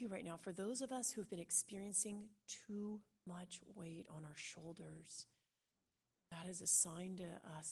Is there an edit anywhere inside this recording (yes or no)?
no